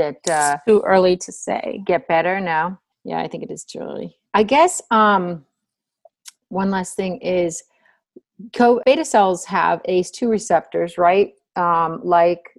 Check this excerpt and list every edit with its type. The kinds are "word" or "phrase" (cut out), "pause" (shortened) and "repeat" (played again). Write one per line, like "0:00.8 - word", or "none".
0:02.9 - pause
0:04.3 - pause
0:08.8 - word

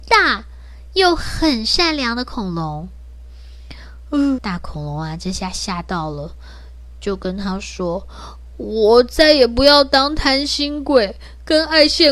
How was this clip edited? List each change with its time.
0:04.4 - word

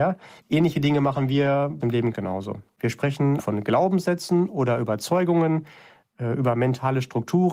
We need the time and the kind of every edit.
0:01.8 - word
0:02.1 - word
0:03.4 - word

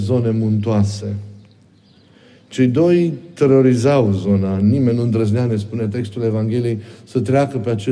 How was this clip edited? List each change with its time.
none

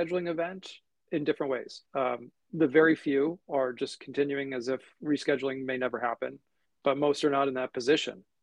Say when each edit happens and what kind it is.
0:01.9 - pause
0:06.7 - pause

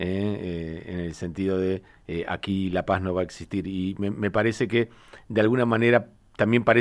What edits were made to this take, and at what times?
none

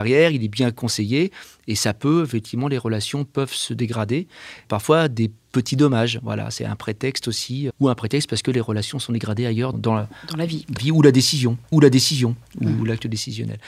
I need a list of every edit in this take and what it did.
0:04.6 - phrase
0:07.7 - word
0:09.7 - word
0:10.8 - word
0:11.7 - repeat

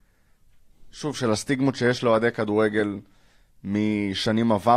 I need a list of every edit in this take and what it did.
none

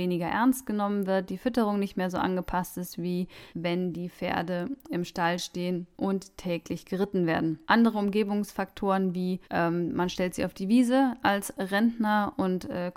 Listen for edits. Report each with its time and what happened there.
0:03.5 - pause
0:05.9 - pause
0:07.6 - pause
0:09.4 - pause

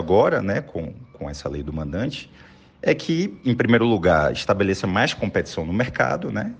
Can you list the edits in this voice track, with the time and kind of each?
none

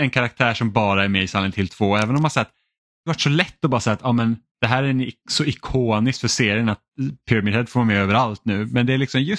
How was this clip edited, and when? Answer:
0:03.1 - phrase

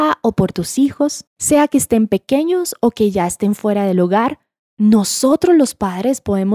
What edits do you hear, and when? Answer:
0:01.3 - pause

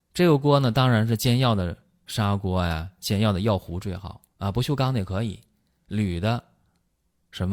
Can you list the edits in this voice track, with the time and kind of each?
0:04.3 - pause

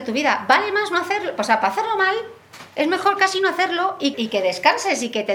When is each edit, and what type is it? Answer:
0:02.7 - pause
0:04.1 - word

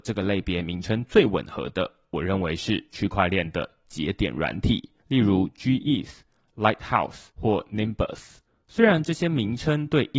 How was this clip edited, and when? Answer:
0:05.0 - pause
0:07.3 - pause
0:08.5 - pause

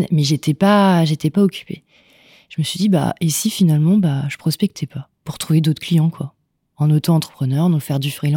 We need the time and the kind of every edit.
none

